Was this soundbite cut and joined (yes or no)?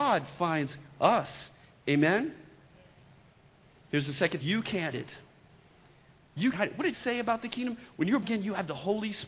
yes